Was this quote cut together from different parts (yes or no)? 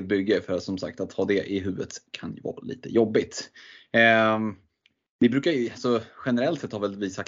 no